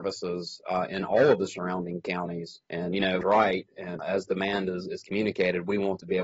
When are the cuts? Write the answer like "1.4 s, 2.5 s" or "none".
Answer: 2.6 s, 3.2 s, 4.0 s